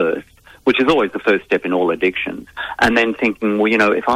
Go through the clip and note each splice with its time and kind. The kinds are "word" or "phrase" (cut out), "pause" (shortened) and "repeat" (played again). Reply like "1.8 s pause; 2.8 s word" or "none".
none